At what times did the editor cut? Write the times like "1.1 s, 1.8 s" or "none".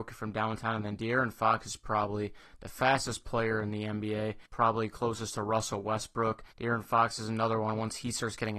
4.5 s, 6.5 s